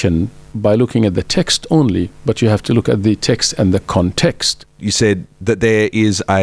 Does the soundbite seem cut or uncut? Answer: uncut